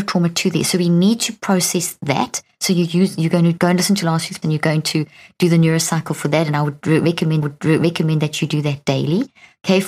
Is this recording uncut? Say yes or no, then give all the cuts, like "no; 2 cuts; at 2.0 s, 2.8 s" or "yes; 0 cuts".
no; 3 cuts; at 3.6 s, 4.4 s, 7.4 s